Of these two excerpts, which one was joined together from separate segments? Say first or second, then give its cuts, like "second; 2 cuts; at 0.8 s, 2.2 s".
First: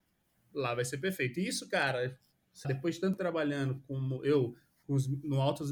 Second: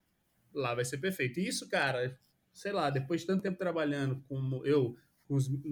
first; 2 cuts; at 2.6 s, 3.2 s